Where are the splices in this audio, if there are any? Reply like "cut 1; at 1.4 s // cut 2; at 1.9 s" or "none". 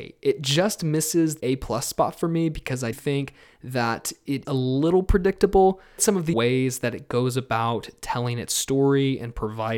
cut 1; at 1.4 s // cut 2; at 2.9 s // cut 3; at 4.4 s // cut 4; at 6.0 s // cut 5; at 6.3 s

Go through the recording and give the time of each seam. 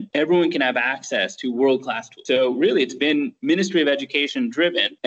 none

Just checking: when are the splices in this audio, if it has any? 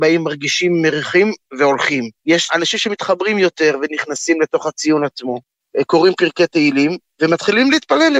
cut 1; at 2.2 s

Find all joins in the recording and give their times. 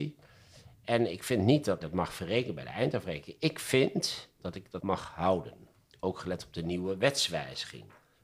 cut 1; at 1.8 s // cut 2; at 4.4 s // cut 3; at 4.8 s

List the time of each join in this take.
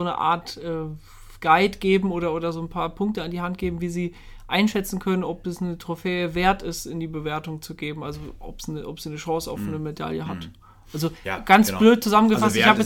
none

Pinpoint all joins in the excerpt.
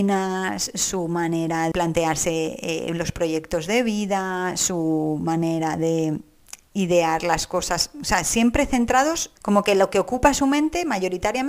cut 1; at 1.7 s // cut 2; at 6.6 s // cut 3; at 9.4 s

